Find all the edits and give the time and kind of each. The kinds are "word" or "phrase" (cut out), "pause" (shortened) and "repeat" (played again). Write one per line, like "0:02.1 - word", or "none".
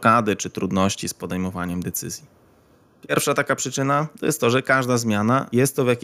none